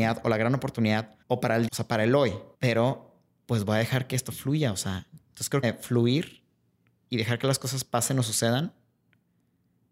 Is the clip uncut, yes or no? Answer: no